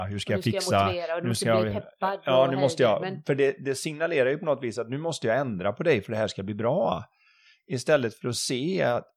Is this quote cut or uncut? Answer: uncut